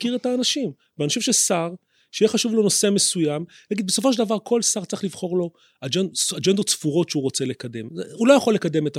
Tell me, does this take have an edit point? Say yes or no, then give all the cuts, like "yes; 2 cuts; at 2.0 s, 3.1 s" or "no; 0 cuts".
no; 0 cuts